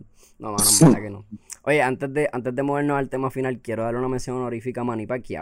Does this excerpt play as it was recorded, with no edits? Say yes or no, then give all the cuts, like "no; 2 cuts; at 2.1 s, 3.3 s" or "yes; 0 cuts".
yes; 0 cuts